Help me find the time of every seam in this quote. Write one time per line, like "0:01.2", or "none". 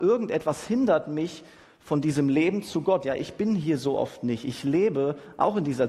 none